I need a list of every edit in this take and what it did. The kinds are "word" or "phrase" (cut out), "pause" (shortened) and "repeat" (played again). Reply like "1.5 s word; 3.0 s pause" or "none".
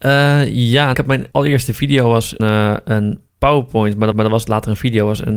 0.9 s phrase; 1.3 s pause; 2.4 s word; 3.3 s pause; 4.1 s repeat